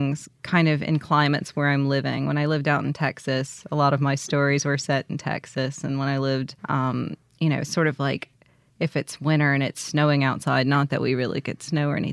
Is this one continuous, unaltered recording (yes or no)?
no